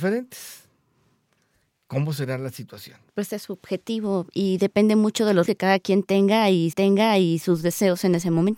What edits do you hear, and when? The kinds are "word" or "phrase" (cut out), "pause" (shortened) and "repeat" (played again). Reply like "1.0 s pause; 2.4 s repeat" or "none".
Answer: 3.1 s pause; 5.5 s word; 6.7 s repeat